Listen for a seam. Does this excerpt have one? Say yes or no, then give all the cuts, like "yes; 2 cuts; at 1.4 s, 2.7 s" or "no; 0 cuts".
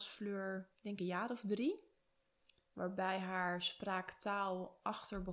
no; 0 cuts